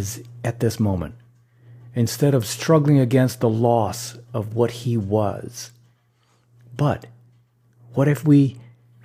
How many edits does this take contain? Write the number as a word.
zero